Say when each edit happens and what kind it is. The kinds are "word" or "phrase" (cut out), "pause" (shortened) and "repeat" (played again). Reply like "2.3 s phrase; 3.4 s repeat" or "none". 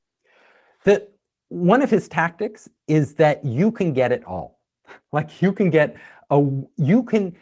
none

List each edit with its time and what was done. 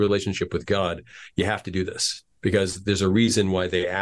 2.3 s pause

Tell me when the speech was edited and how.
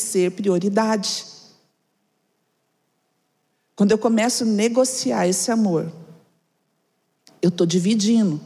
none

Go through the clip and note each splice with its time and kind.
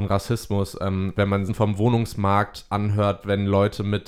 1.2 s word; 1.5 s phrase

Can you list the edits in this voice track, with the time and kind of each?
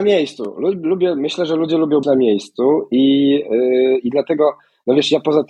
2.0 s word

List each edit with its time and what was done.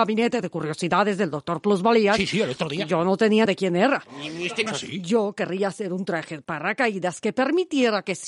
3.5 s phrase; 4.7 s word

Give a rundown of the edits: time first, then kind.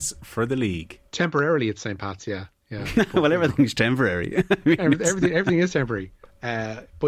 1.1 s pause

